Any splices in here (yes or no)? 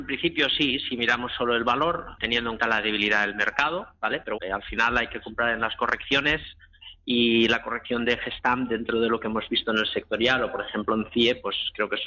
yes